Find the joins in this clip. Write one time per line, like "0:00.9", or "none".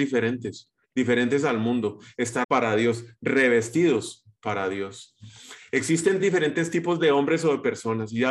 0:02.4
0:04.4
0:06.2